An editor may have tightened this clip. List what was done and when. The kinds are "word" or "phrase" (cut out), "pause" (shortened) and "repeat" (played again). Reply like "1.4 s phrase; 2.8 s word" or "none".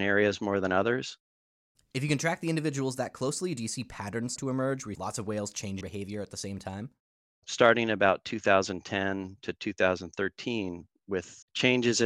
4.4 s word; 4.9 s word; 5.8 s word